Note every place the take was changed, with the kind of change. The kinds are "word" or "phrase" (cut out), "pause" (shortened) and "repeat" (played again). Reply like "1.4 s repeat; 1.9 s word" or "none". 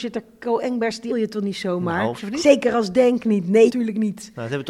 1.1 s word; 2.2 s word; 3.7 s word